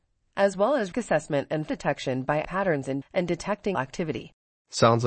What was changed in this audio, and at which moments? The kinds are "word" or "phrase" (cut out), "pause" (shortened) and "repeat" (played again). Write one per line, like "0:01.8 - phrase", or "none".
0:00.9 - word
0:01.7 - word
0:02.4 - word
0:03.0 - word
0:03.7 - word

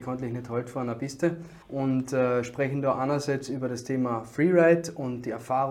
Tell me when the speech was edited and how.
0:01.6 - pause

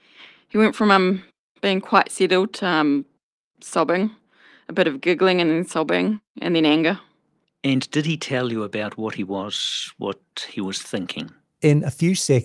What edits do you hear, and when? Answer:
none

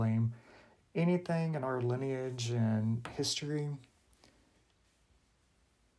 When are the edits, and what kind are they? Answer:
none

